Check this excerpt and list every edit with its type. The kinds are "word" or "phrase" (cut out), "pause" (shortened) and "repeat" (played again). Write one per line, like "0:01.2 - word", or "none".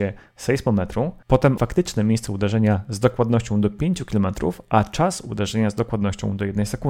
0:01.6 - word